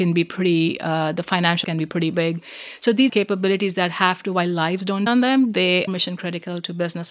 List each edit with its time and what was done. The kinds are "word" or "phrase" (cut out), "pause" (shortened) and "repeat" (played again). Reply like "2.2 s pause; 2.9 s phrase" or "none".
1.6 s word; 3.1 s word; 5.1 s word; 5.9 s word